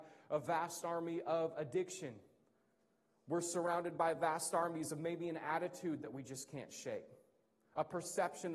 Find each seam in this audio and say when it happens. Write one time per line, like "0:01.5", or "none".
none